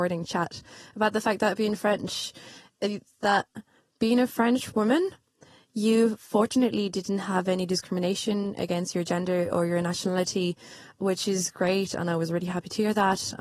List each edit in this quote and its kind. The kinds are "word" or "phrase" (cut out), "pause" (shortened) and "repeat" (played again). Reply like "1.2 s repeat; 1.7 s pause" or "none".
none